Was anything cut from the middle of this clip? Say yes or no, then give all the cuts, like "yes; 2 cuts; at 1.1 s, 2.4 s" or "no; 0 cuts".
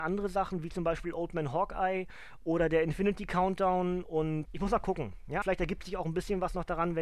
yes; 2 cuts; at 4.5 s, 5.4 s